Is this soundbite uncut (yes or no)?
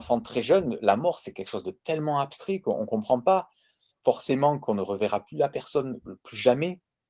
yes